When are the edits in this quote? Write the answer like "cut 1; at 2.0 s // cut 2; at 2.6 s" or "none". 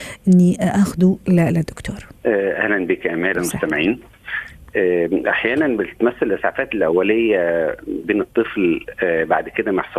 cut 1; at 2.2 s // cut 2; at 3.3 s // cut 3; at 8.0 s